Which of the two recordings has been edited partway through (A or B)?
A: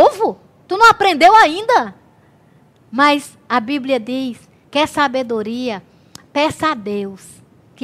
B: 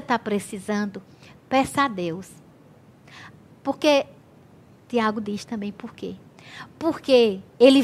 A